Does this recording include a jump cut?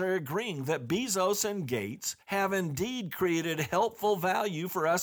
yes; 1 cut; at 2.2 s

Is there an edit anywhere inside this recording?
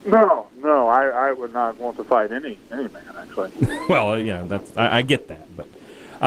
no; 0 cuts

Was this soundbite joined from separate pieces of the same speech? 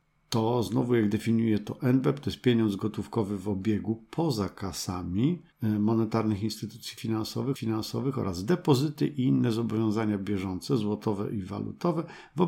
yes; 2 cuts; at 5.5 s, 7.5 s

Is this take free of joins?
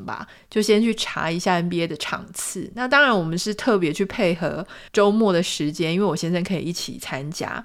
no; 1 cut; at 4.9 s

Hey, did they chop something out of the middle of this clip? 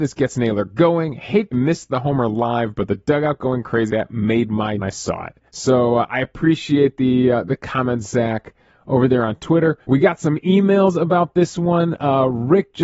yes; 5 cuts; at 1.5 s, 3.9 s, 4.8 s, 5.5 s, 9.8 s

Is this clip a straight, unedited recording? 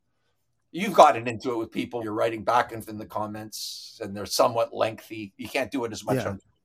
no; 2 cuts; at 2.0 s, 2.9 s

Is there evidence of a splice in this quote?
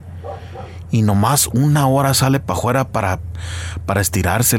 no; 0 cuts

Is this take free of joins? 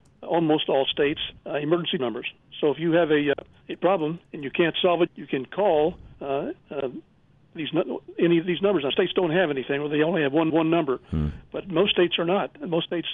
no; 8 cuts; at 1.4 s, 2.0 s, 3.6 s, 4.2 s, 5.1 s, 6.1 s, 8.9 s, 10.5 s

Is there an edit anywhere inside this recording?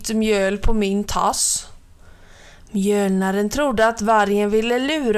no; 0 cuts

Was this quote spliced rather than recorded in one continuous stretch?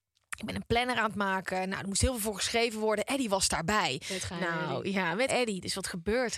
yes; 1 cut; at 5.3 s

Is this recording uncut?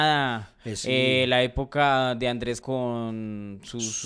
no; 1 cut; at 2.6 s

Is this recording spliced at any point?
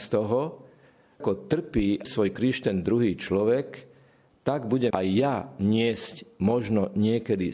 yes; 3 cuts; at 1.2 s, 2.0 s, 4.9 s

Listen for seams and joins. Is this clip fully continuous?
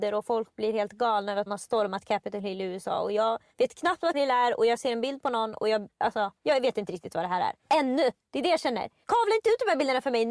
no; 2 cuts; at 1.5 s, 4.1 s

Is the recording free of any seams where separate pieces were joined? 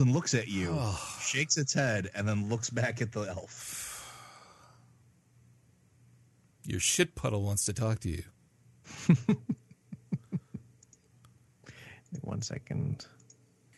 yes; 0 cuts

